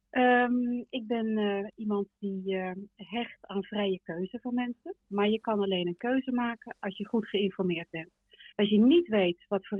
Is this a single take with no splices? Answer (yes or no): no